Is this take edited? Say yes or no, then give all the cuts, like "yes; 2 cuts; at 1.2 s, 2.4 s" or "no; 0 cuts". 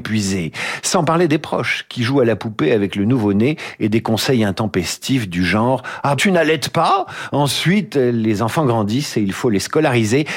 yes; 1 cut; at 6.2 s